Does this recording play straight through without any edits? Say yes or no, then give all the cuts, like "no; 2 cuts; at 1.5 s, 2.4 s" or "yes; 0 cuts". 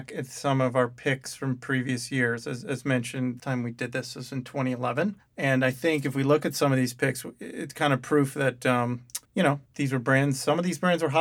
no; 4 cuts; at 3.4 s, 5.2 s, 9.2 s, 9.7 s